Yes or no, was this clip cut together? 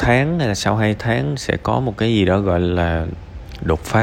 no